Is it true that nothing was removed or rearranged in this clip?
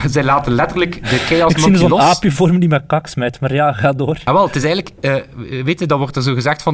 yes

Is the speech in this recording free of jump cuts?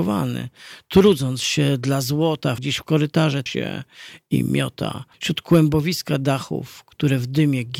no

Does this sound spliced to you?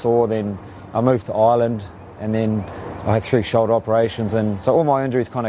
no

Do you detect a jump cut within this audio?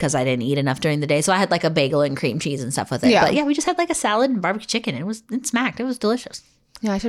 no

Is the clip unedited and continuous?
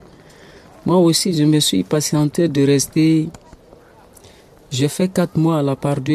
yes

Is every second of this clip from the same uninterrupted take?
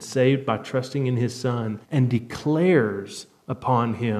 no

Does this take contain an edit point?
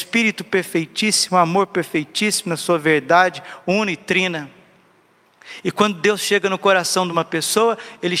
no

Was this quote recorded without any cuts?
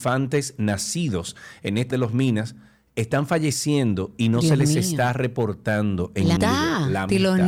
no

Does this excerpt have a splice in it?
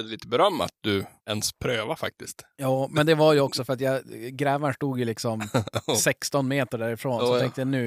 yes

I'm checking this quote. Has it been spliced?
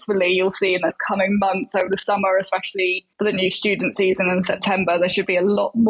yes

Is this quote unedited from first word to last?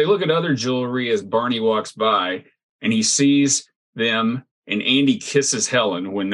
yes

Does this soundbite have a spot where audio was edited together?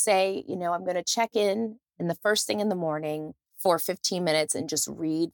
yes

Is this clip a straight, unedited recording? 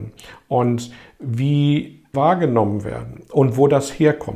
no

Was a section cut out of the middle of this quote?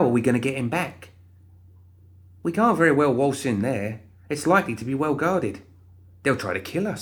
no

